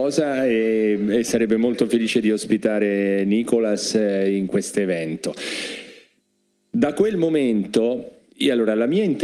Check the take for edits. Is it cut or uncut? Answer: uncut